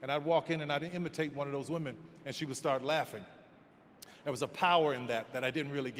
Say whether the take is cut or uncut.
uncut